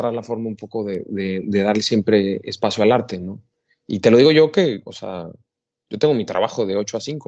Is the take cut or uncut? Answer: uncut